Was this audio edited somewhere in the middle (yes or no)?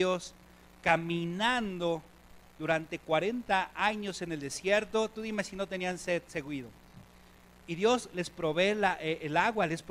no